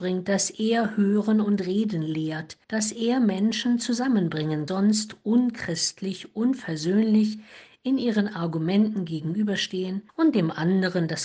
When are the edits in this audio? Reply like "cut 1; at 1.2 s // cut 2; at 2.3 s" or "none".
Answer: cut 1; at 2.6 s // cut 2; at 4.7 s // cut 3; at 10.1 s